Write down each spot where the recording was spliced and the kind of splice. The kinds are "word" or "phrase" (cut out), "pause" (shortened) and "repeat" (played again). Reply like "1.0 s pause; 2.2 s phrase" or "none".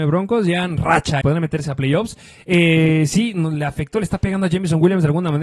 1.2 s word